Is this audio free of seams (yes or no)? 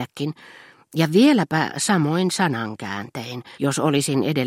no